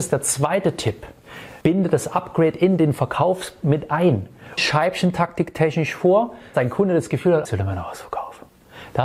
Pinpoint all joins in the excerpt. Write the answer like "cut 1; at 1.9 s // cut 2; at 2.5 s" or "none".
cut 1; at 1.6 s // cut 2; at 4.6 s // cut 3; at 6.5 s // cut 4; at 7.4 s